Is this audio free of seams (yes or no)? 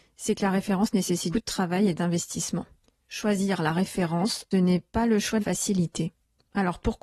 no